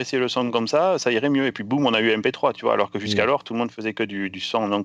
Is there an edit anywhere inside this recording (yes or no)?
no